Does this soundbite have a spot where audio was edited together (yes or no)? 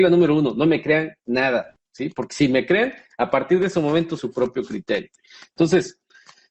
yes